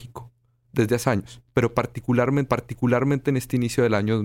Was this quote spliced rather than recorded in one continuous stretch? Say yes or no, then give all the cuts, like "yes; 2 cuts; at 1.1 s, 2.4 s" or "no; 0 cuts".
yes; 2 cuts; at 1.0 s, 2.5 s